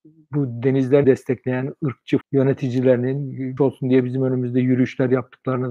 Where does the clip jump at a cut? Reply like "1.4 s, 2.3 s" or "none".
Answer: 1.0 s, 2.2 s, 3.6 s